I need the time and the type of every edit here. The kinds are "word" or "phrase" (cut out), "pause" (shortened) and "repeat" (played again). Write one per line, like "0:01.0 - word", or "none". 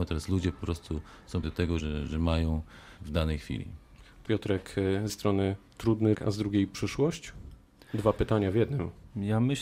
0:01.4 - word
0:01.8 - word
0:03.0 - word
0:04.3 - word
0:05.1 - word
0:06.1 - word